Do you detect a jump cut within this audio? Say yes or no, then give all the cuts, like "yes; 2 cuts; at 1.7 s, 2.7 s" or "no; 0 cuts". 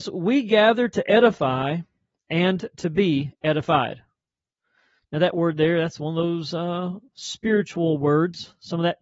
no; 0 cuts